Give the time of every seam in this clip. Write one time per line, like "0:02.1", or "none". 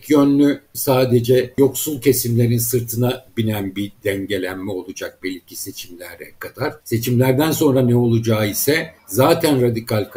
0:06.8
0:09.0